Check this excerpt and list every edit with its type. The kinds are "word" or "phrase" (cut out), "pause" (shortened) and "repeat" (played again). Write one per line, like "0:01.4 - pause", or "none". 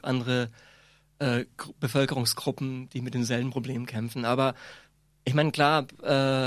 none